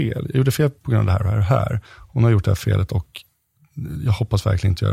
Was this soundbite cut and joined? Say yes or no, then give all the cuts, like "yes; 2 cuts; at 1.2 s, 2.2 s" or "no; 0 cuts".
yes; 1 cut; at 1.9 s